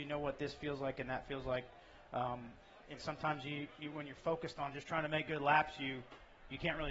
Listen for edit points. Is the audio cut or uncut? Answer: uncut